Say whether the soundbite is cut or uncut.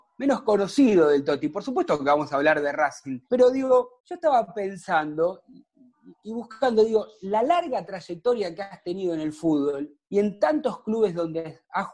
cut